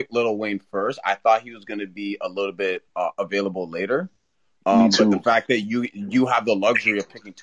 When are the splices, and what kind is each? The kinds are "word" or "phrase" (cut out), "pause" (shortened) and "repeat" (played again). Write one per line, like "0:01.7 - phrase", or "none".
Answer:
none